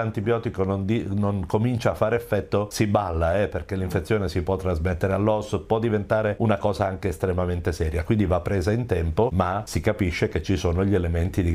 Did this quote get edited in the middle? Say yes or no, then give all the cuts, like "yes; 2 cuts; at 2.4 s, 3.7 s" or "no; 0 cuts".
no; 0 cuts